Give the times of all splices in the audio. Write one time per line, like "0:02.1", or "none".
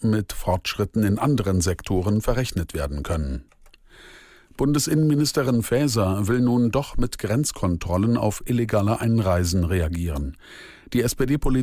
none